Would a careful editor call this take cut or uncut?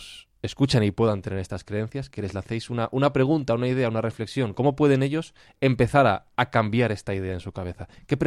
uncut